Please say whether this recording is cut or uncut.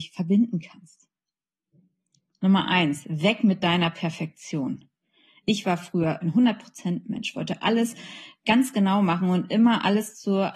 uncut